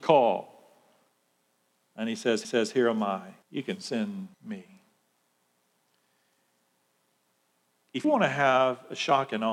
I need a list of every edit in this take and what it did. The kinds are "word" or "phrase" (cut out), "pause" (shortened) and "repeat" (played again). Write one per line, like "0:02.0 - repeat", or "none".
0:02.4 - repeat
0:03.4 - pause
0:04.3 - pause
0:08.0 - word